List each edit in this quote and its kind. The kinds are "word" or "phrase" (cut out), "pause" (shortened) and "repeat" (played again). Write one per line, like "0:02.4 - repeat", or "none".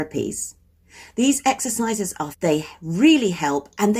0:02.3 - word